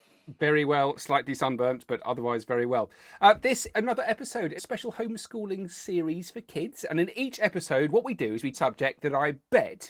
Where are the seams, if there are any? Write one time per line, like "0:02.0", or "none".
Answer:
0:03.7
0:04.6
0:08.5